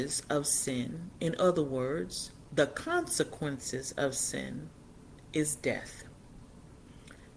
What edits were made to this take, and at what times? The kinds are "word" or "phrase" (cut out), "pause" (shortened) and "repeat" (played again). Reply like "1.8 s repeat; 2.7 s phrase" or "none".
none

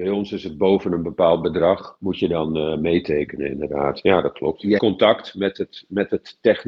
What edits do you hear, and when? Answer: 4.8 s word

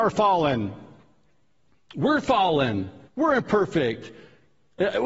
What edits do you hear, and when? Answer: 3.1 s pause

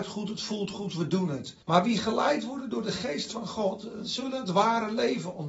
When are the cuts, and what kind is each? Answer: 1.6 s pause

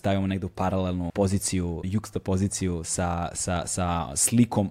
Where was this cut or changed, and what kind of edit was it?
1.1 s word; 1.8 s word

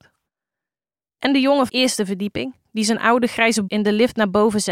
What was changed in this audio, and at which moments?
1.7 s phrase; 3.7 s word

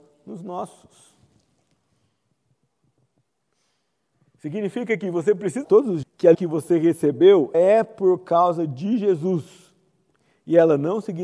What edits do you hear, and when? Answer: 5.6 s word; 6.0 s word; 6.3 s word; 7.5 s word

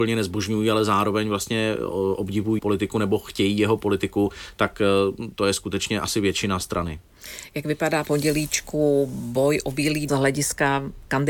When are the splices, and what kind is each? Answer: 2.6 s word; 8.1 s word; 10.1 s phrase

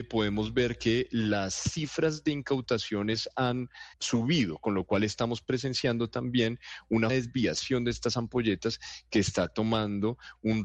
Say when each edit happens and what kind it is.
3.9 s word; 7.1 s word

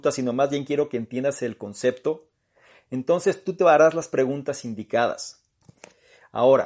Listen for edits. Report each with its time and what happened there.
none

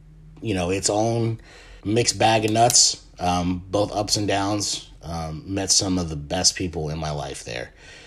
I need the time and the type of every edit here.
1.8 s pause

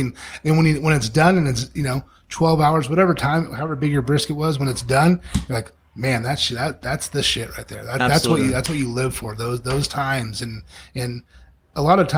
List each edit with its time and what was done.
none

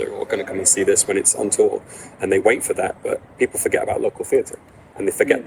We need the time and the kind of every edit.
none

